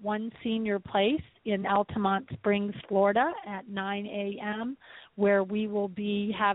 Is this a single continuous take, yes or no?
yes